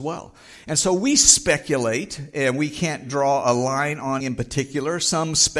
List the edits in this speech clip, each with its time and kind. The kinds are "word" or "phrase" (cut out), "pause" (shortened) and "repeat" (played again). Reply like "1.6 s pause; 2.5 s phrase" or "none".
4.2 s word